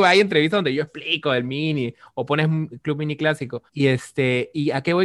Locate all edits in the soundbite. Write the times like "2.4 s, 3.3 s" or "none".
3.7 s